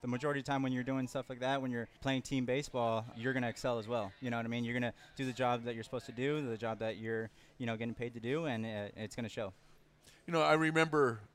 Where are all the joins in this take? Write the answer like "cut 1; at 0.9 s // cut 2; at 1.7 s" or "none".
cut 1; at 2.0 s // cut 2; at 3.1 s